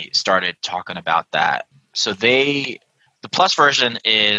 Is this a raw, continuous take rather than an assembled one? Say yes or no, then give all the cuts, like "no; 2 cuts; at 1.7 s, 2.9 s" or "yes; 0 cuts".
yes; 0 cuts